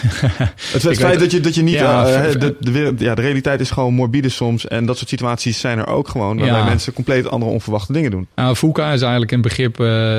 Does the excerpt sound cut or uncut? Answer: cut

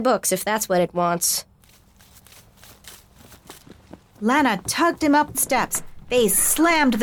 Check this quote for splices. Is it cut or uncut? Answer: cut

